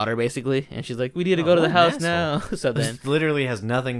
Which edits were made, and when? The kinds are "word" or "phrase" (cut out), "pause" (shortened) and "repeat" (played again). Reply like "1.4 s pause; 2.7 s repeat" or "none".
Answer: none

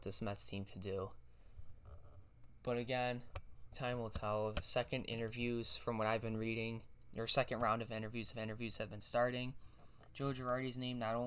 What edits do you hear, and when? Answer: 3.7 s word; 8.3 s repeat

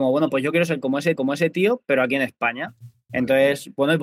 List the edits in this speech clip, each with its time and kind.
1.1 s repeat

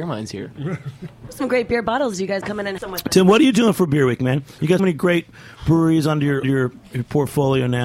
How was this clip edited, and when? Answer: 2.4 s word; 2.8 s word; 4.8 s word; 6.4 s word

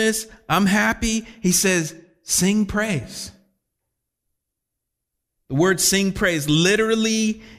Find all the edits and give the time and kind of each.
none

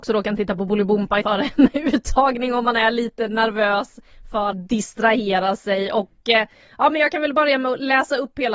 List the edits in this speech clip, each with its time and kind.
1.2 s word; 4.5 s word

